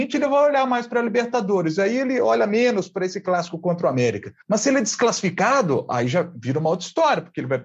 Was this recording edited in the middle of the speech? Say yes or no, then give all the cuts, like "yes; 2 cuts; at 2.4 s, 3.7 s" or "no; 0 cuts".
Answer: yes; 1 cut; at 4.4 s